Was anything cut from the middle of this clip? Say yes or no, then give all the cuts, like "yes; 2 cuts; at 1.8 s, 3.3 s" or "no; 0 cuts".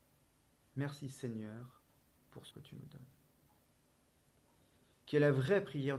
yes; 1 cut; at 2.5 s